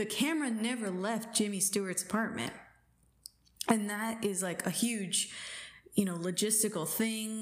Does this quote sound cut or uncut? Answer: uncut